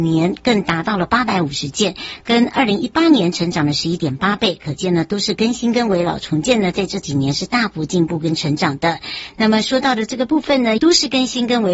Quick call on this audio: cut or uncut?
cut